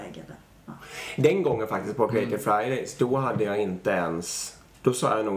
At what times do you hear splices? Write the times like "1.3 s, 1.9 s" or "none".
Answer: none